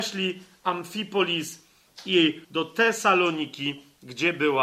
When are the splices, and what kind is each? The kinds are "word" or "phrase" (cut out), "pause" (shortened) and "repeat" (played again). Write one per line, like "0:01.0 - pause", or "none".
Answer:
0:02.4 - phrase

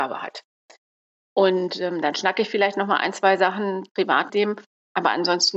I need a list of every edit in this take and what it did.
0:04.3 - word

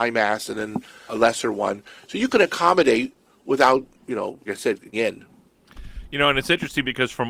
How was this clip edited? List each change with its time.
0:01.1 - word
0:03.9 - pause
0:04.5 - word
0:04.9 - word

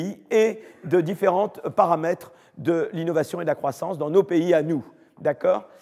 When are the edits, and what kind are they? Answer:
none

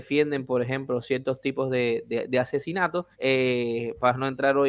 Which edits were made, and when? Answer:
0:03.1 - pause

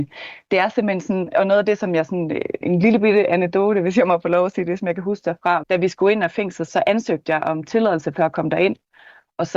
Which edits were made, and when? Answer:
0:01.3 - word
0:02.6 - word
0:05.6 - word
0:06.7 - word

